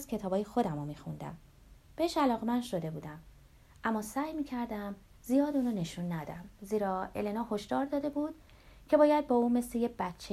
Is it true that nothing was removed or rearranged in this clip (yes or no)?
yes